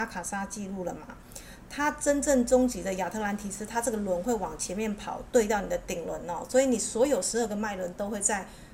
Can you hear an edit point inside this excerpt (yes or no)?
no